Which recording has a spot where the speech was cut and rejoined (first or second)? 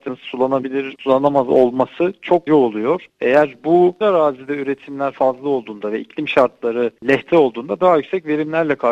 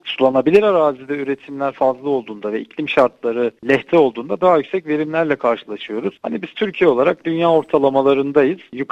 first